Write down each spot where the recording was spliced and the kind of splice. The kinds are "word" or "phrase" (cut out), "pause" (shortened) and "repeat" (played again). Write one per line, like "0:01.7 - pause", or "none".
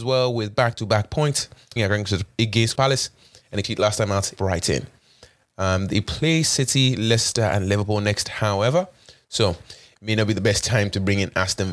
0:01.8 - word
0:02.7 - word
0:03.6 - word
0:04.4 - word